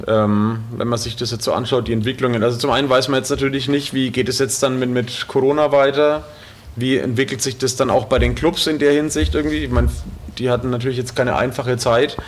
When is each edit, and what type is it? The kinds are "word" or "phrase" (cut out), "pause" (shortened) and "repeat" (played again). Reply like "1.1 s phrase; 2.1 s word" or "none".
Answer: none